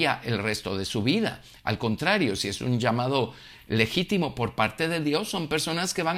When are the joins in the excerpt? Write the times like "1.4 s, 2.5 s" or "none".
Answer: none